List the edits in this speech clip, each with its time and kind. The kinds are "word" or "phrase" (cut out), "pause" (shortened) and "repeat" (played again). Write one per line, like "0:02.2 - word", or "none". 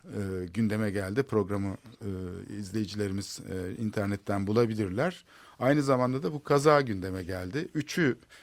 none

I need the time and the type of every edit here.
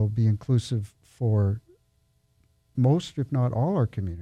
0:02.7 - word

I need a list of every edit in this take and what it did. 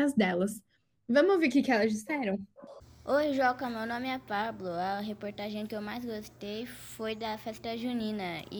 none

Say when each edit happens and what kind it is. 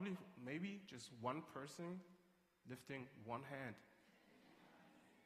none

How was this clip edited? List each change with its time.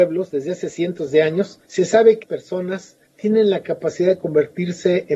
0:01.6 - pause
0:02.2 - word
0:03.1 - pause

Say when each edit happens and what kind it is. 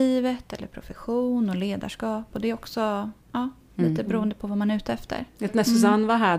0:03.2 - pause
0:05.5 - word

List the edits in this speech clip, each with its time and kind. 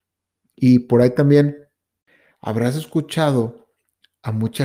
none

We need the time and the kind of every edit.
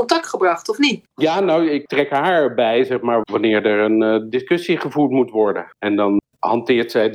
0:01.1 - pause
0:05.7 - pause

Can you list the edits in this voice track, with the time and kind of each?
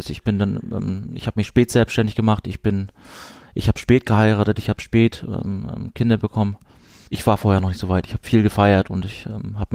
none

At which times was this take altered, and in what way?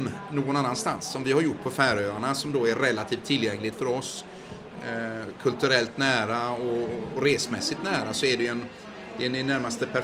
none

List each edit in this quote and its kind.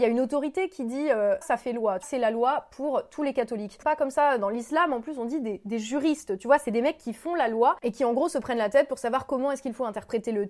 0:01.4 - word
0:02.0 - phrase
0:03.8 - phrase

